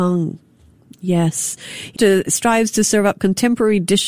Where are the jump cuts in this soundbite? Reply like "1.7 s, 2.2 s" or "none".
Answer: 2.0 s, 2.3 s